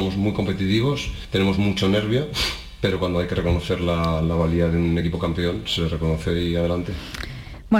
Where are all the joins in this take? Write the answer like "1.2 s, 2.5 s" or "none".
none